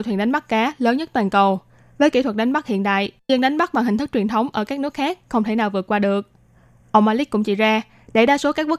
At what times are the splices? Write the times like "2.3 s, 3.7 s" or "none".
3.3 s